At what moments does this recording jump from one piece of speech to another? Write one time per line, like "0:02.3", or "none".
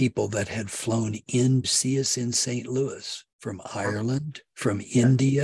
0:01.6
0:03.3